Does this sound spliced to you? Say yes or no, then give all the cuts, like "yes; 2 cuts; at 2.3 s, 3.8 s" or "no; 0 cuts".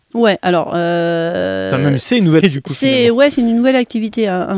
yes; 1 cut; at 2.4 s